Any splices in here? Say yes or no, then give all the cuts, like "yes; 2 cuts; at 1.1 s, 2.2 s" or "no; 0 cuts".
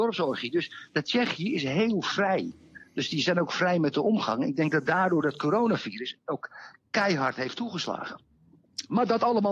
no; 0 cuts